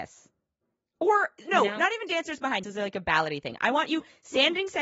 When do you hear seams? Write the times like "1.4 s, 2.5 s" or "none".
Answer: 2.6 s